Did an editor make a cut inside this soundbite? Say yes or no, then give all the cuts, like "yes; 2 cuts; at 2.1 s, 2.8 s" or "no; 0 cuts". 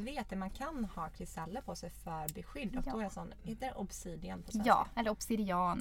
no; 0 cuts